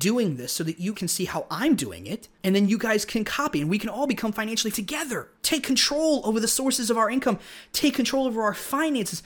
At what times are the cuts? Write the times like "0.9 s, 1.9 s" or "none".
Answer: 0.9 s, 2.3 s, 4.7 s, 5.4 s

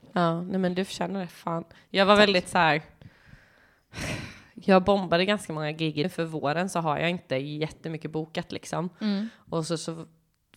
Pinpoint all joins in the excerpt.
1.3 s, 6.0 s

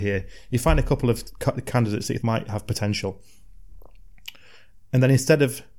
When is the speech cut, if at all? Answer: 2.2 s

